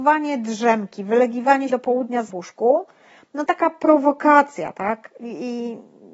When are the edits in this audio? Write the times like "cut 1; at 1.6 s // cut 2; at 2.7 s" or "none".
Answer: cut 1; at 1.7 s // cut 2; at 2.3 s // cut 3; at 3.5 s